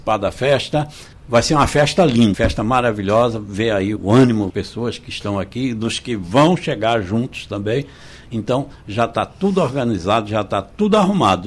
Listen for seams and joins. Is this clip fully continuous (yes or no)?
no